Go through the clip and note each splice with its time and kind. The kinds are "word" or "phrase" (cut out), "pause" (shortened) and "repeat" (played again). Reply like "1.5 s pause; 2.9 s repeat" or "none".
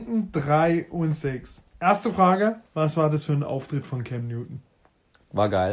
1.7 s pause; 2.7 s pause